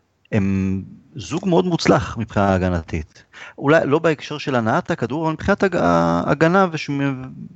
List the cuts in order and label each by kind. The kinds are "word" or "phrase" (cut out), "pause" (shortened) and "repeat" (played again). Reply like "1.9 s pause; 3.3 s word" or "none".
none